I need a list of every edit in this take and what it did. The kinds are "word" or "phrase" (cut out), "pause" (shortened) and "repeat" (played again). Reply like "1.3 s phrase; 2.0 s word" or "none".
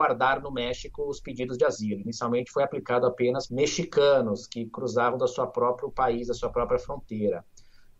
3.5 s word